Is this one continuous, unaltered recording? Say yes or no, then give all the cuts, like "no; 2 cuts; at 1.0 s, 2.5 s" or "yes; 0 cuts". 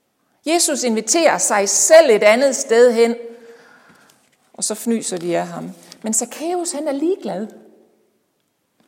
yes; 0 cuts